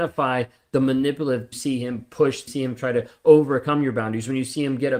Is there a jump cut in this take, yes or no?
yes